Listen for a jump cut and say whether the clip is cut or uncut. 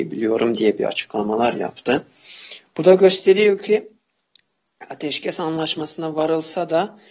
uncut